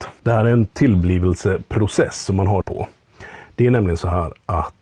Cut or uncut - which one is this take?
cut